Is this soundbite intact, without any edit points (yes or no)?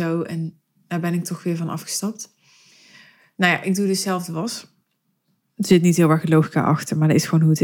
yes